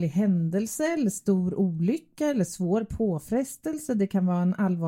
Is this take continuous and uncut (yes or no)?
yes